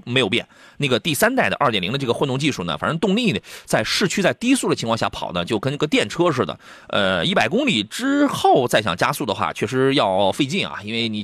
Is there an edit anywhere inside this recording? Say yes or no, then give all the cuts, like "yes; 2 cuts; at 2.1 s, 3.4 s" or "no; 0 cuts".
no; 0 cuts